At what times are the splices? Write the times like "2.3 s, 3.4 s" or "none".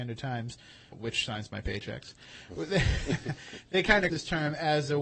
0.9 s, 4.1 s